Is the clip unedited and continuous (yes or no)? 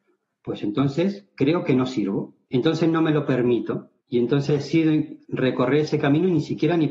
no